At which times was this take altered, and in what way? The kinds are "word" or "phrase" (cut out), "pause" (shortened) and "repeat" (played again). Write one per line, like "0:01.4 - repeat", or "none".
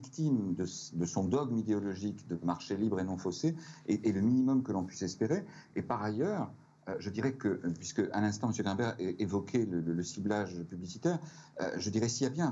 none